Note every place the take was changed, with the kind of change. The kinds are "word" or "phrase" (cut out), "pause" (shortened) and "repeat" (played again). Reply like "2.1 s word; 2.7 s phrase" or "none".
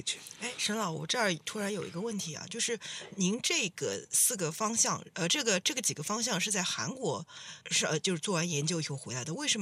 7.6 s pause